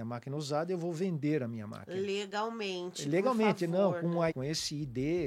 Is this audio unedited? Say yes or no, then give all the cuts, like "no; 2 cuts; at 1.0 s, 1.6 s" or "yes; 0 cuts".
no; 1 cut; at 4.3 s